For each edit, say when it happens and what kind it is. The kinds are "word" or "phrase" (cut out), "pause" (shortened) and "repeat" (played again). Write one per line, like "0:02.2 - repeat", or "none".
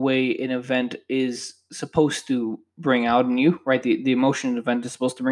none